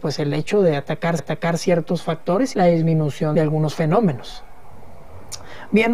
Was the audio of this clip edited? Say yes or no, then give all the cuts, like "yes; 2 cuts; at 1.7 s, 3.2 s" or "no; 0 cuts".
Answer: yes; 3 cuts; at 1.2 s, 2.5 s, 3.3 s